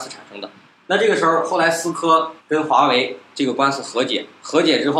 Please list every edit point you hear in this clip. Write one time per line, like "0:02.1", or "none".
0:02.4